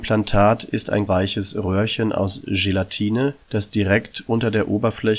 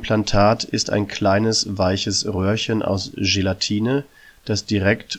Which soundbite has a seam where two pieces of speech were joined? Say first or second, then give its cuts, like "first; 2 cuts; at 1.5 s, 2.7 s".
first; 2 cuts; at 1.1 s, 3.4 s